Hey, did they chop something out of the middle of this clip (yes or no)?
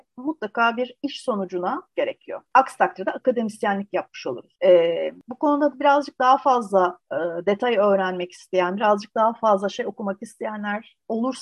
yes